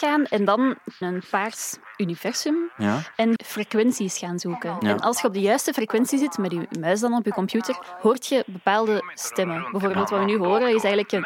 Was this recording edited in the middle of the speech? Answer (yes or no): yes